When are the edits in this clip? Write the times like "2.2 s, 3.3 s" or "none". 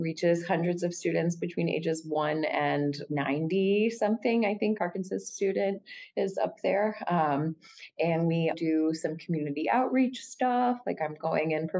3.1 s, 4.8 s, 8.5 s

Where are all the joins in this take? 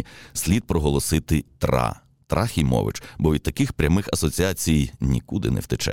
1.5 s

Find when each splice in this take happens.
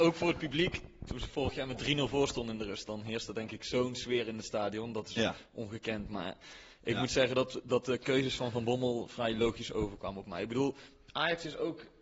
2.9 s

